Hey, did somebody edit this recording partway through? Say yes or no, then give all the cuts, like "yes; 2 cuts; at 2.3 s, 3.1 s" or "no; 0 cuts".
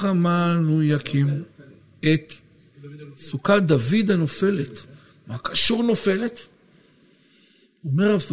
no; 0 cuts